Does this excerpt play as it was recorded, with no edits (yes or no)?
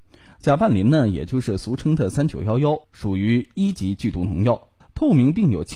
no